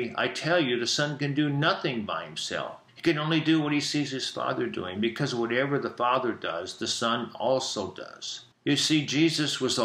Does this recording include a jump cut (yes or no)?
yes